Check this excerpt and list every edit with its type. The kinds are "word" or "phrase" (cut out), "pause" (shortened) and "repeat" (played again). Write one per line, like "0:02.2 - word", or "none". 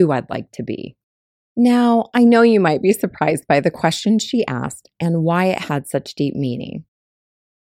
0:01.3 - pause